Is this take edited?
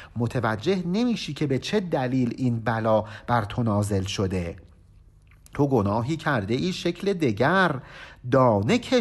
no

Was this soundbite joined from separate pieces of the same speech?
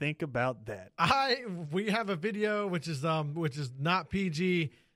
no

